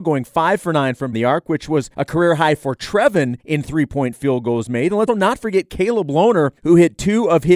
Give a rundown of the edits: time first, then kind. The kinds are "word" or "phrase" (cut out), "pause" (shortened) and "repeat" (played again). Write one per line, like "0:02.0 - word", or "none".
0:01.1 - word
0:01.9 - pause
0:03.4 - pause
0:05.1 - word
0:06.6 - pause